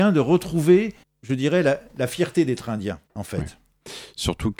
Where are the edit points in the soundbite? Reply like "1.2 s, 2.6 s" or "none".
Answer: 1.0 s, 3.1 s